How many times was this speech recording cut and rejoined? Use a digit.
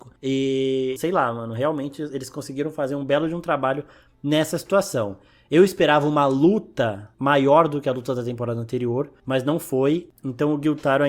1